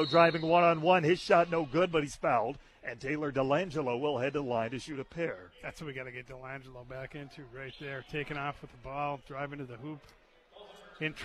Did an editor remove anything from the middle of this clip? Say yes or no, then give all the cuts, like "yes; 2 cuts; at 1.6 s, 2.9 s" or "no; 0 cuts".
no; 0 cuts